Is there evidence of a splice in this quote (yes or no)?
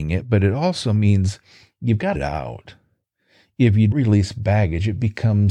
yes